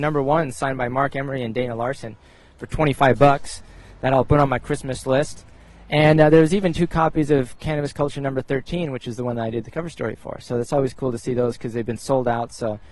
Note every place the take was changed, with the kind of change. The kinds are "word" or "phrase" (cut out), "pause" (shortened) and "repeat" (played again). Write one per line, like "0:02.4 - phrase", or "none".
none